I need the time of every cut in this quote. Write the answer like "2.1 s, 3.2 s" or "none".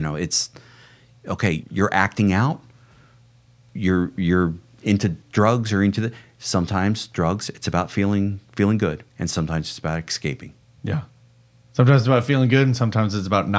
1.6 s, 5.2 s, 9.1 s